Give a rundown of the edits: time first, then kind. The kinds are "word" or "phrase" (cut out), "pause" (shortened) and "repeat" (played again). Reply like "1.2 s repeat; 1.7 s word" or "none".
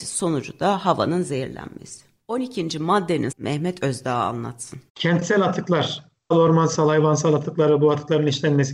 2.2 s pause; 3.3 s word; 4.9 s pause; 6.3 s word